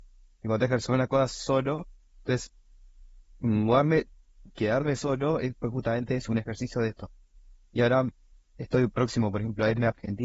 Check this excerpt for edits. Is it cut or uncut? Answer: uncut